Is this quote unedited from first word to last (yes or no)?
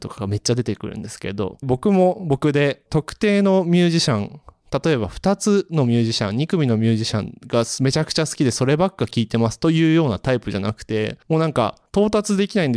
no